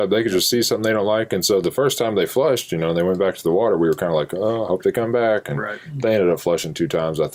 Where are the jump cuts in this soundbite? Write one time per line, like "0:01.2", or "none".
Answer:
none